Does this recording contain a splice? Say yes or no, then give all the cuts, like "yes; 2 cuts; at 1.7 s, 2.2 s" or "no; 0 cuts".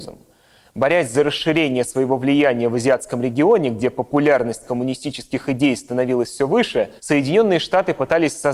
yes; 1 cut; at 7.0 s